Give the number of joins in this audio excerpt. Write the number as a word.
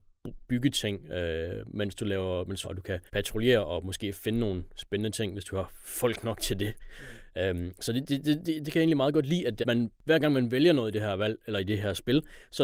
three